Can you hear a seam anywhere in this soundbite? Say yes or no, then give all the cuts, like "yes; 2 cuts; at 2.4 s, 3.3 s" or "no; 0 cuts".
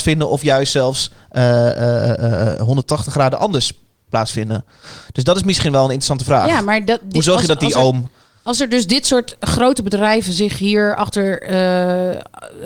no; 0 cuts